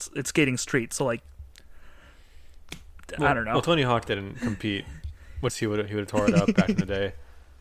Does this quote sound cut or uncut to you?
cut